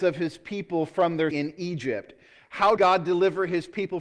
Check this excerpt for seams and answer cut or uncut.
cut